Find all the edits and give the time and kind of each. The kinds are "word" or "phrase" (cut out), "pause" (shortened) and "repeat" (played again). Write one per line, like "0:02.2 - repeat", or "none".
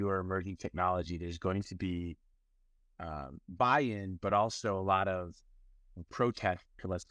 none